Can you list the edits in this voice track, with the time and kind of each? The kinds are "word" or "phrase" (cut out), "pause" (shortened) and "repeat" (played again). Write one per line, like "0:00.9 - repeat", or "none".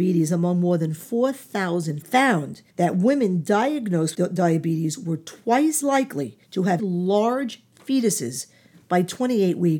0:02.0 - phrase
0:02.7 - pause
0:04.1 - word
0:05.8 - word
0:06.4 - pause
0:06.8 - word